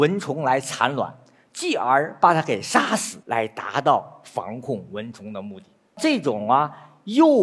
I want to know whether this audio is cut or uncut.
cut